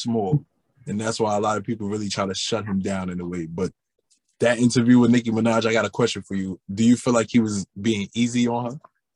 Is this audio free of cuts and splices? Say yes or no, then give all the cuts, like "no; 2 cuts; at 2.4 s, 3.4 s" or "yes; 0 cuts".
no; 1 cut; at 4.0 s